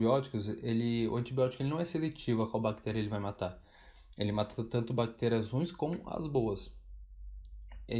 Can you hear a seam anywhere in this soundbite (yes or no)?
no